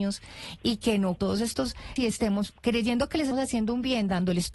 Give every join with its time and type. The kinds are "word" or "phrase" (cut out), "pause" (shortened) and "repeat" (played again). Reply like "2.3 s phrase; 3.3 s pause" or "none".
1.2 s phrase; 2.0 s word; 3.3 s word